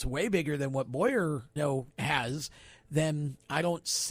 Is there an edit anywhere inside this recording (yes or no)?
yes